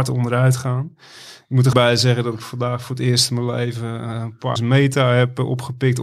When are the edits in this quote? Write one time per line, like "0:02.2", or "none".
0:01.7
0:04.6